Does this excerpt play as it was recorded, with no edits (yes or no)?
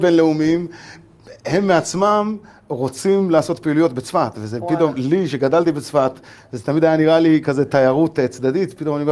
yes